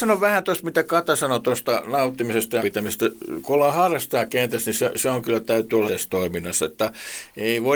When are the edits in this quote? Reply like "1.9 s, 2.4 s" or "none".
2.6 s, 5.9 s